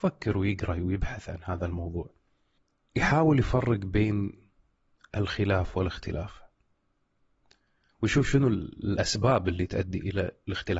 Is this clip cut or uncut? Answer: uncut